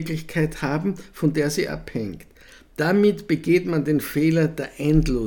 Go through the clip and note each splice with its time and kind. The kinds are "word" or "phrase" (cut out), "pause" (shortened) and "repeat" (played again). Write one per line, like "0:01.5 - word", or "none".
none

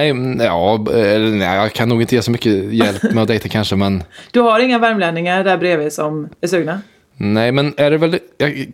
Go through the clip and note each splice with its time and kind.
none

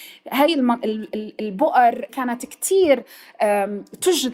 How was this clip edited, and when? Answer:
0:02.1 - phrase

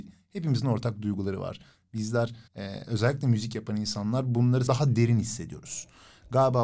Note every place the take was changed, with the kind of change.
0:02.5 - pause
0:04.7 - word

